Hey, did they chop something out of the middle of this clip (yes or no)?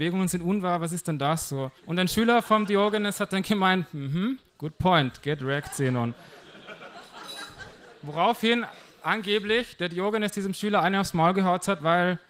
yes